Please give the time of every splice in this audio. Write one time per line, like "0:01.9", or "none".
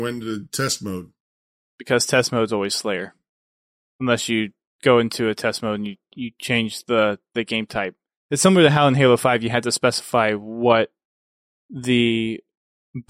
none